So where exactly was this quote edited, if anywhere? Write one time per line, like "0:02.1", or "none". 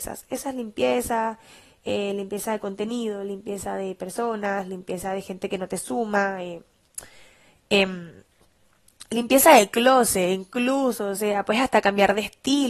none